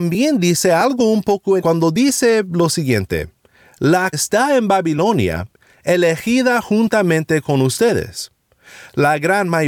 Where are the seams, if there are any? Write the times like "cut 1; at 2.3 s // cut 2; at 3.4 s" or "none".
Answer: cut 1; at 1.6 s // cut 2; at 4.1 s